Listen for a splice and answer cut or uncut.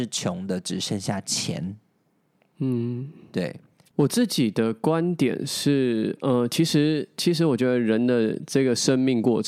uncut